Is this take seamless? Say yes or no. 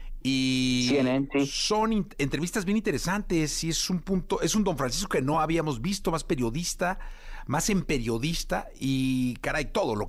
yes